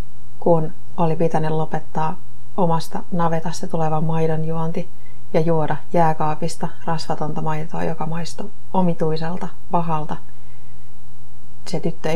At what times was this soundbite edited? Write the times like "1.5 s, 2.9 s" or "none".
none

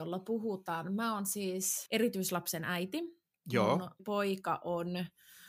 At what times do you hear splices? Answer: 1.9 s, 4.0 s

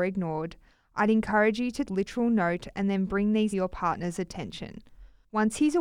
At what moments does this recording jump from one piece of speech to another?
1.9 s, 3.5 s

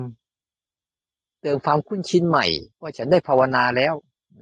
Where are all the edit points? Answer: 2.7 s

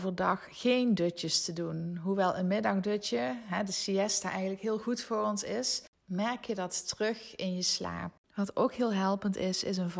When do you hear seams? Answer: none

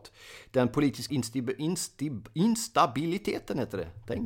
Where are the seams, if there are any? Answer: 1.1 s

